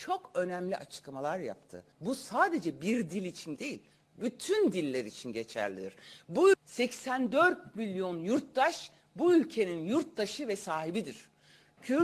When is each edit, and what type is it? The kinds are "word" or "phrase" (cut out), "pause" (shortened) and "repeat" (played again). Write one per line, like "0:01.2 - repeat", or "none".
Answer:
0:01.9 - pause
0:03.6 - word
0:06.5 - word